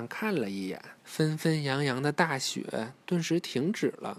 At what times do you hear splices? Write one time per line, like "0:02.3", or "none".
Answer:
0:01.0